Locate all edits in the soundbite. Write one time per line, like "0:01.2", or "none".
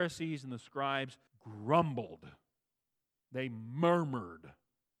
0:01.3